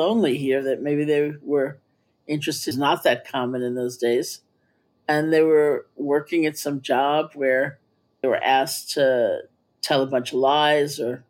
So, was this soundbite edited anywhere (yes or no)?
yes